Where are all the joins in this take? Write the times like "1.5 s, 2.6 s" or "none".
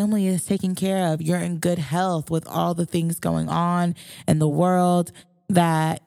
none